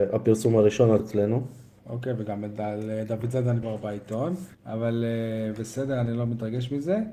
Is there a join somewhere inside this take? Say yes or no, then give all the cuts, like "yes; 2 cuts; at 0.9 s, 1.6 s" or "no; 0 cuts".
yes; 3 cuts; at 1.0 s, 3.6 s, 4.5 s